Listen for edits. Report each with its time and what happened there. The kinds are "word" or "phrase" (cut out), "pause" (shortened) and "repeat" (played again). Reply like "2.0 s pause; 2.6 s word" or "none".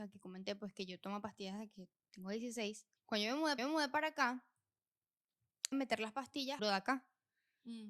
3.0 s pause; 3.6 s repeat; 5.7 s phrase; 6.6 s phrase